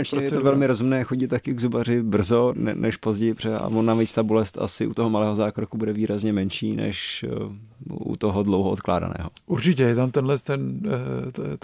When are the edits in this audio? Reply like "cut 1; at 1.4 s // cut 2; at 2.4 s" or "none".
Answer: cut 1; at 2.5 s